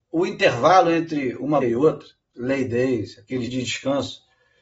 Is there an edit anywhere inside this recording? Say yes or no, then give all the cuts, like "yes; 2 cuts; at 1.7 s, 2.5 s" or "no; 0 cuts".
yes; 3 cuts; at 1.6 s, 2.3 s, 3.5 s